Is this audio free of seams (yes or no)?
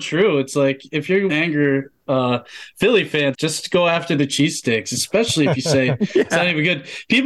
no